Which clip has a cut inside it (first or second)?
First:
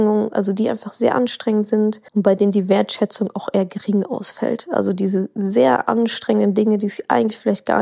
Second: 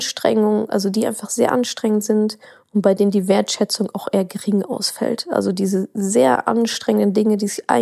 first